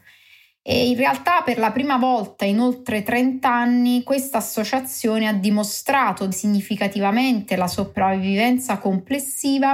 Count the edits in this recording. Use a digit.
1